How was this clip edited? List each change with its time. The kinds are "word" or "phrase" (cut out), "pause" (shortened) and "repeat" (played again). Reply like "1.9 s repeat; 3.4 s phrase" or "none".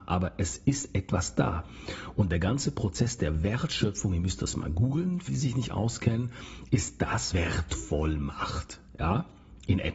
5.3 s word; 7.3 s phrase